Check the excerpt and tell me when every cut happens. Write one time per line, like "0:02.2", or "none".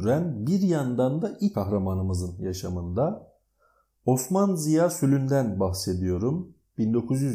0:01.5